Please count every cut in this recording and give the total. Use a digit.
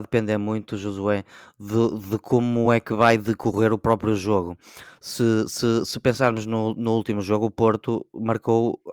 0